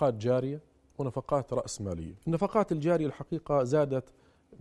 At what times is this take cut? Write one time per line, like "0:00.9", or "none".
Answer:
0:02.2